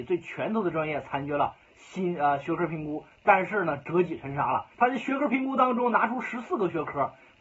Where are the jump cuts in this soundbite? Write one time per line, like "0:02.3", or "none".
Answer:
0:04.7